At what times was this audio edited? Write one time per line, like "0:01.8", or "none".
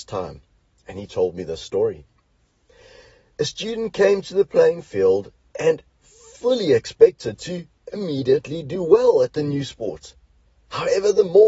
none